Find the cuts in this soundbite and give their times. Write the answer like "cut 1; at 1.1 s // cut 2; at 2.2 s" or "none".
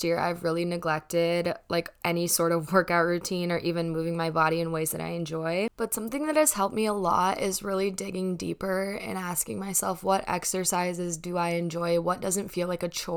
none